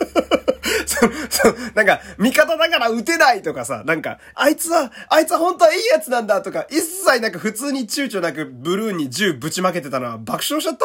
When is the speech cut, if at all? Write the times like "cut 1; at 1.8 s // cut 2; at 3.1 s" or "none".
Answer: cut 1; at 4.3 s